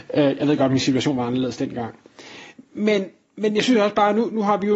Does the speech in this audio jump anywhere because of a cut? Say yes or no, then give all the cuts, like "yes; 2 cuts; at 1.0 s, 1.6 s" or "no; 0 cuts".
yes; 1 cut; at 2.6 s